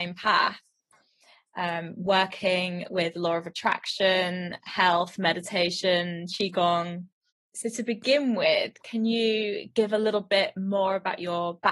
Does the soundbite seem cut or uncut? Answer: uncut